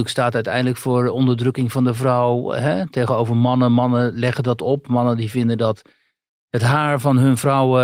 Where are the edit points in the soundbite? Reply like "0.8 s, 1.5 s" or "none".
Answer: none